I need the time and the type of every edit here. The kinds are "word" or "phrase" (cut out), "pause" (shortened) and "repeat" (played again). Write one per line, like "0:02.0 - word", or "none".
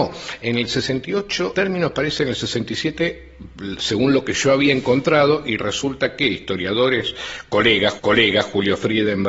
0:01.5 - word
0:08.0 - repeat